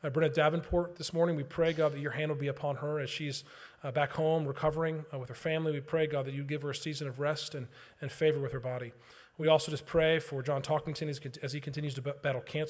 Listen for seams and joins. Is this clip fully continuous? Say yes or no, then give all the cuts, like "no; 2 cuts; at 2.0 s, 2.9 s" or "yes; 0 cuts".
yes; 0 cuts